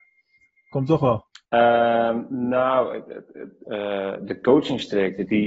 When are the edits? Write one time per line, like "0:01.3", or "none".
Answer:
0:01.4
0:03.6